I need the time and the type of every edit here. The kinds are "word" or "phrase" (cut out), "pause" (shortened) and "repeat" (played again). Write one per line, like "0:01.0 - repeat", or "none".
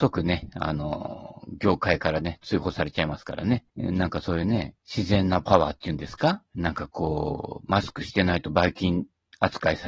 0:03.7 - pause
0:04.8 - pause
0:06.5 - pause